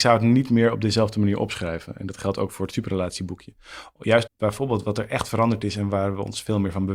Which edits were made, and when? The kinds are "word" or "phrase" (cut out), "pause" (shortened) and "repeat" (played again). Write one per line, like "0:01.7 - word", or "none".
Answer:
0:04.3 - word